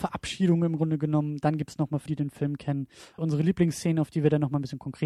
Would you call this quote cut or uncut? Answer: cut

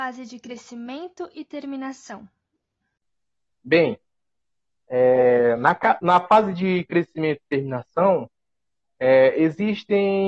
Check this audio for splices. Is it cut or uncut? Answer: uncut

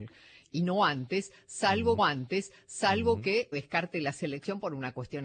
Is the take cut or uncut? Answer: cut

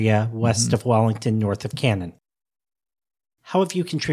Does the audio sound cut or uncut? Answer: uncut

